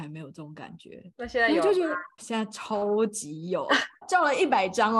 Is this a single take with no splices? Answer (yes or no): no